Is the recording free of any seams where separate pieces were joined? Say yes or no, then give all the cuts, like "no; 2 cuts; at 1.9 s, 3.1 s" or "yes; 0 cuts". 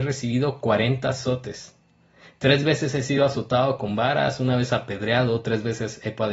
yes; 0 cuts